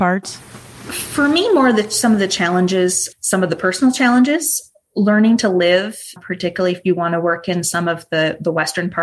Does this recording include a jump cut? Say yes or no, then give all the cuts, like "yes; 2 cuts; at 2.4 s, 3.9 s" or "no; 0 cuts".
yes; 2 cuts; at 3.1 s, 6.2 s